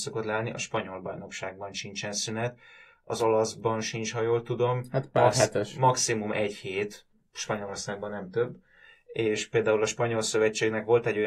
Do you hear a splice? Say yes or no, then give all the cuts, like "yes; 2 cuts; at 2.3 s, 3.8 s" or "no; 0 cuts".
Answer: no; 0 cuts